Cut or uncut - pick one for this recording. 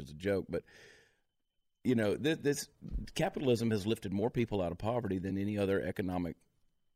uncut